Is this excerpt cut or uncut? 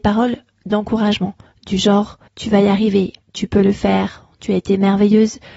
cut